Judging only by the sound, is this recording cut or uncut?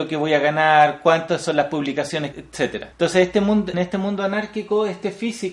cut